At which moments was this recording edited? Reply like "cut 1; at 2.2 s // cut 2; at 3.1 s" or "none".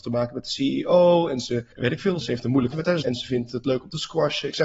cut 1; at 1.7 s // cut 2; at 2.2 s // cut 3; at 2.7 s // cut 4; at 3.0 s